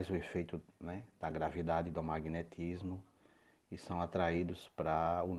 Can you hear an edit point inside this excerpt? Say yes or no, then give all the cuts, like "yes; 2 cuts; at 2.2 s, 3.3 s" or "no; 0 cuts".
no; 0 cuts